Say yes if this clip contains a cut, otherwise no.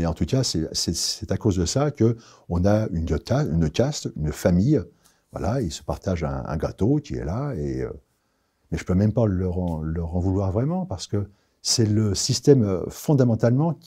no